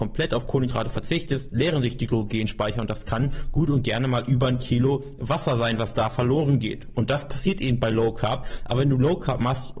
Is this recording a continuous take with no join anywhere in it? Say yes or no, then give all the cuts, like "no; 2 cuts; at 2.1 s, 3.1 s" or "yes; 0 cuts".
yes; 0 cuts